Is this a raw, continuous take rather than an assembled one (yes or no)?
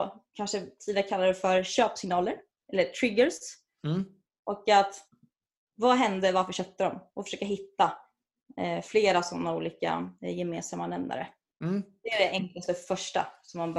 yes